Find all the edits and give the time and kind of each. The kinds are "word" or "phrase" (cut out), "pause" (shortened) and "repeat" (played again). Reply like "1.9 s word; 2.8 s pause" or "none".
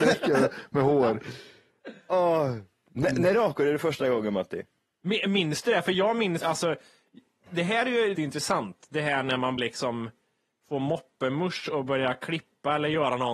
6.4 s word; 8.1 s word; 9.6 s word